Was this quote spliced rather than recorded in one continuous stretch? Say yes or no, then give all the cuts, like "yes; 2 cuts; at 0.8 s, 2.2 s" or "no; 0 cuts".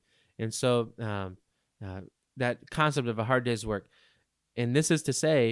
no; 0 cuts